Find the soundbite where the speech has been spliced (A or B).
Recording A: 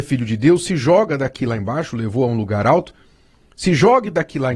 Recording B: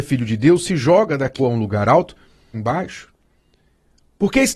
B